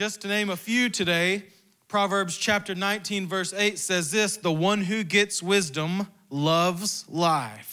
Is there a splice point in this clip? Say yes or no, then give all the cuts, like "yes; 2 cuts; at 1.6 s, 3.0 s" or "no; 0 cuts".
no; 0 cuts